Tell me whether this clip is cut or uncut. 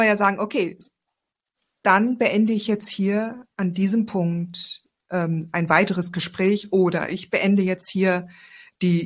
uncut